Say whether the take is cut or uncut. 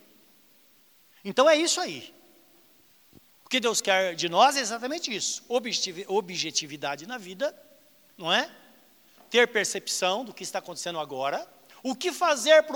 uncut